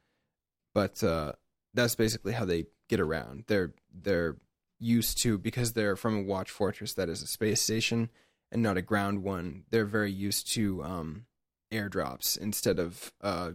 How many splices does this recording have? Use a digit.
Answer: 0